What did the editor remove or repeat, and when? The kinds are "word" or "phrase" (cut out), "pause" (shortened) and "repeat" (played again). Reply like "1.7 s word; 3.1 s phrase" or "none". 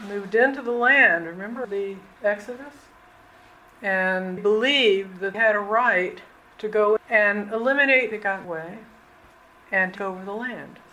1.6 s word; 4.4 s word; 5.3 s word; 7.0 s word; 8.1 s word; 8.4 s word; 10.0 s word

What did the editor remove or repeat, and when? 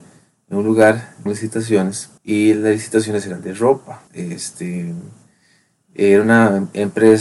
1.3 s word; 2.2 s pause; 4.1 s pause

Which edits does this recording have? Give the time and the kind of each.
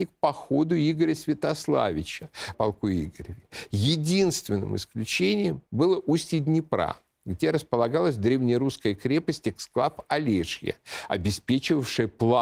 2.5 s phrase; 5.7 s pause

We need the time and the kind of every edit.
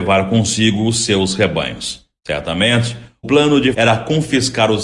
3.2 s word; 3.7 s word

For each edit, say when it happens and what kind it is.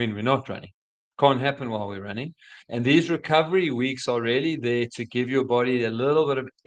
2.6 s pause

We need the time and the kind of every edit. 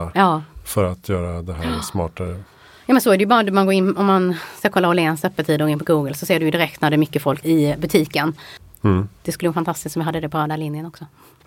none

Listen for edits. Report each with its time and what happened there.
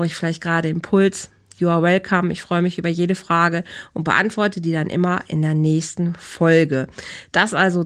none

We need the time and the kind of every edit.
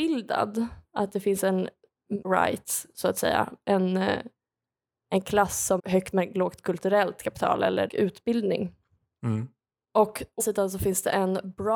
2.2 s word; 5.8 s word; 6.1 s word; 7.9 s word; 10.4 s word

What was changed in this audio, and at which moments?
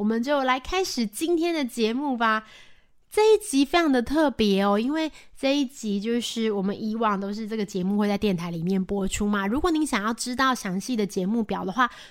none

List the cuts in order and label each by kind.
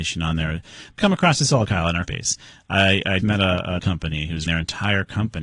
1.0 s word; 1.7 s word; 2.1 s word; 3.2 s word; 3.8 s word; 4.5 s word

